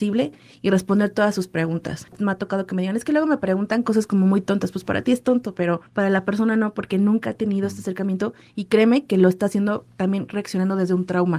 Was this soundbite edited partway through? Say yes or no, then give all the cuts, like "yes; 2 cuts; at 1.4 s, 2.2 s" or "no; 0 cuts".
yes; 1 cut; at 5.9 s